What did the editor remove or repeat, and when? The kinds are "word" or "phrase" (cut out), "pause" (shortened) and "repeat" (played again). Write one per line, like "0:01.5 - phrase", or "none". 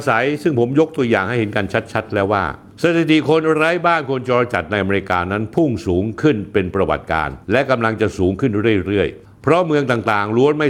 0:07.4 - pause